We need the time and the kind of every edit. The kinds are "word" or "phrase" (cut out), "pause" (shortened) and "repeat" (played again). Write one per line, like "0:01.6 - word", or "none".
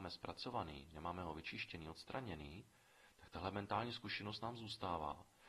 none